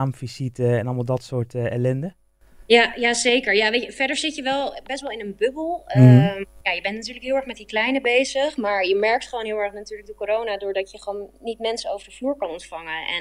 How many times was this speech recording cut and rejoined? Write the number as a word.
one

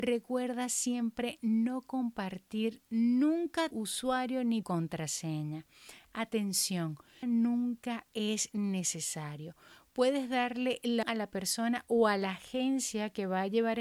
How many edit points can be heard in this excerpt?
four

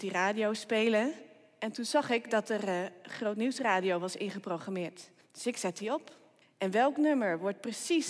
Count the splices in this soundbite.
two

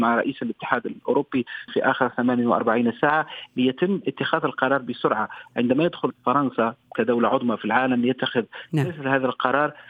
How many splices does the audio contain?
two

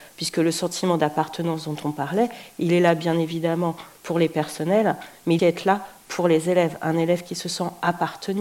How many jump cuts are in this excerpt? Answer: one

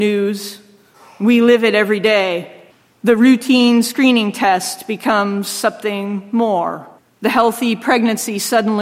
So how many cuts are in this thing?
two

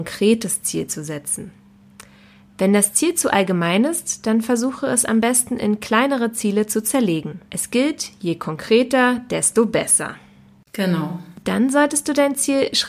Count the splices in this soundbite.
one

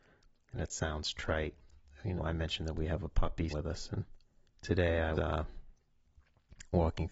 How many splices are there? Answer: four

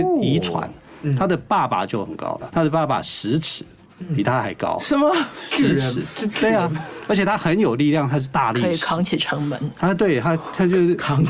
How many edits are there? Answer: one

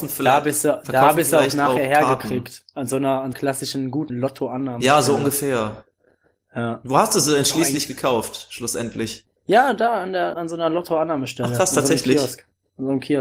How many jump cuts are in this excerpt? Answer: four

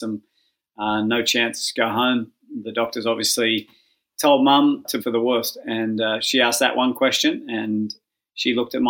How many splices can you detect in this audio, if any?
one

